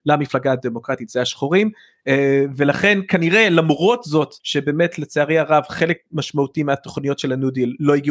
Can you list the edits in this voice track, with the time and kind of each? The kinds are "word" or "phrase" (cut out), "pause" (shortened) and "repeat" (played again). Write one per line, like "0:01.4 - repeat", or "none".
0:04.4 - pause